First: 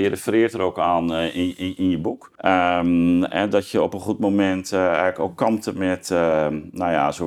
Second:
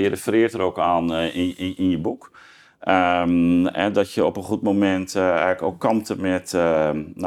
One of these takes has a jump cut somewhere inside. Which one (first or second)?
first